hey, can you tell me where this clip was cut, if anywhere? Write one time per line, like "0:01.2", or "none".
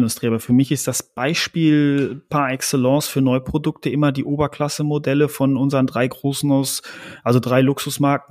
none